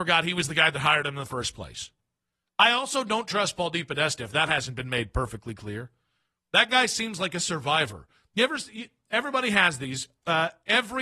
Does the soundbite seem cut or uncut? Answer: uncut